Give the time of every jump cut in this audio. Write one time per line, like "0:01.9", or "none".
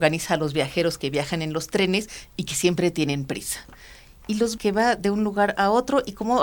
0:04.6